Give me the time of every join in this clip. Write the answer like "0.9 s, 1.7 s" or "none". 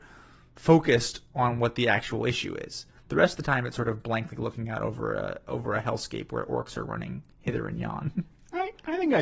7.3 s